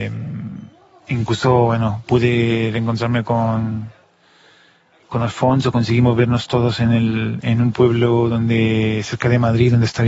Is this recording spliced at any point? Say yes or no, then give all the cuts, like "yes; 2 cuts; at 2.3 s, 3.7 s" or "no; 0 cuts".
no; 0 cuts